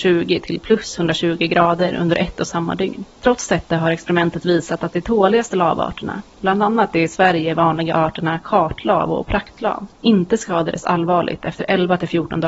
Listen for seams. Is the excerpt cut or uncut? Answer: cut